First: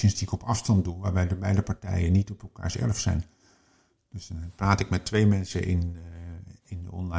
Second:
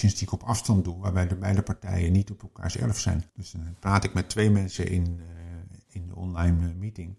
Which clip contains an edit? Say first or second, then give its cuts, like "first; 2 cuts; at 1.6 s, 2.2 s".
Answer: second; 1 cut; at 3.3 s